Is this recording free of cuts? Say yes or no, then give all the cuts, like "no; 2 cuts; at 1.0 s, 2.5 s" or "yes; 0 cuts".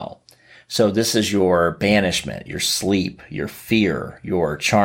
yes; 0 cuts